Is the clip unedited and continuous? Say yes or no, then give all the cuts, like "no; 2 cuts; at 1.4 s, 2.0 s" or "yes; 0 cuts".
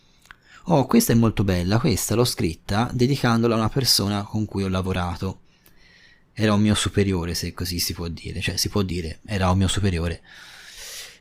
yes; 0 cuts